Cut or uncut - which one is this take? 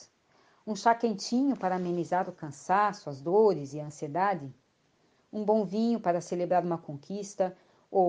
uncut